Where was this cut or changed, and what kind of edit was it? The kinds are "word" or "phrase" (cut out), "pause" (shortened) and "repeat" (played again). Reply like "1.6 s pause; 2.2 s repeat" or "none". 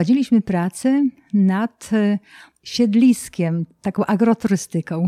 none